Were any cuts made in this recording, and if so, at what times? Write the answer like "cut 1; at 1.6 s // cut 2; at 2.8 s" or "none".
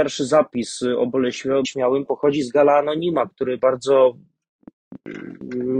cut 1; at 1.6 s